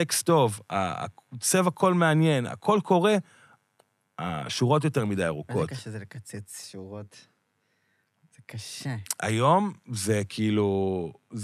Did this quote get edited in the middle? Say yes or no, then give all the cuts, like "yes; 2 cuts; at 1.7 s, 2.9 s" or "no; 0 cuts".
no; 0 cuts